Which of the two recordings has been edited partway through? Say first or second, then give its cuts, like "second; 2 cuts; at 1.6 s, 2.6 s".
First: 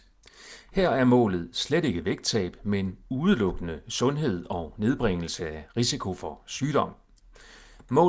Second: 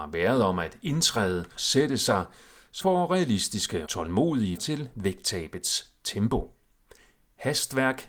second; 4 cuts; at 1.6 s, 2.8 s, 3.9 s, 4.6 s